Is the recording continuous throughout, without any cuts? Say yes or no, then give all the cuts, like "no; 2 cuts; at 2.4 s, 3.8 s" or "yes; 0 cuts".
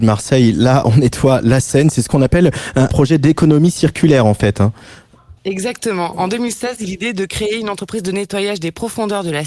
no; 3 cuts; at 2.9 s, 5.4 s, 6.8 s